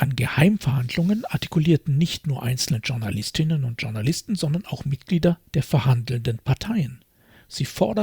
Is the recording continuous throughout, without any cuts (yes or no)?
yes